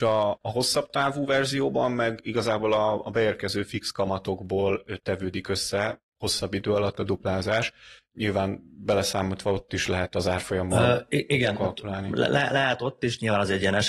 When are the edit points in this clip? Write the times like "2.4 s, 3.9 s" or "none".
none